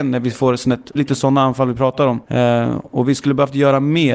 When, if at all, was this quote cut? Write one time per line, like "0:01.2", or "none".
0:01.0
0:02.2